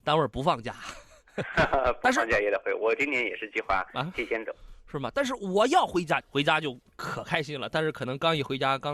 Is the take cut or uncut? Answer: cut